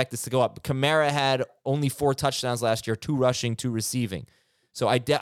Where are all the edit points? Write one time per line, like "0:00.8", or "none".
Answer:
none